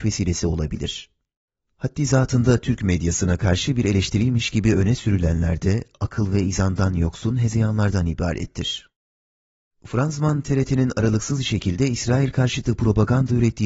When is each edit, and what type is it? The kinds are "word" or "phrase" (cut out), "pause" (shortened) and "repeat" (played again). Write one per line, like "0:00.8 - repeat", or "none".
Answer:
none